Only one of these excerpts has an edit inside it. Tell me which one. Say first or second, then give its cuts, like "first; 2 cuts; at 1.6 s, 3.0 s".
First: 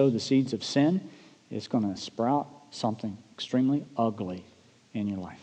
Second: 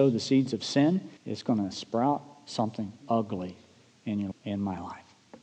second; 3 cuts; at 1.2 s, 3.0 s, 4.3 s